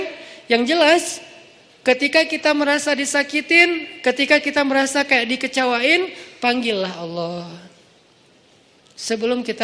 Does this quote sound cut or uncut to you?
uncut